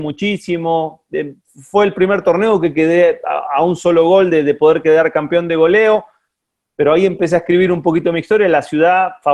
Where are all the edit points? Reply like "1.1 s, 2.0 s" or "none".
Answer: none